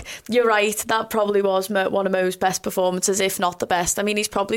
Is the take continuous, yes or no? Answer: yes